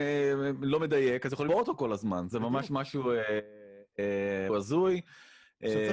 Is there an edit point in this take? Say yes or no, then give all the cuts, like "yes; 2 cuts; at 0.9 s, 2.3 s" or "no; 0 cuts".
yes; 3 cuts; at 1.5 s, 2.3 s, 4.5 s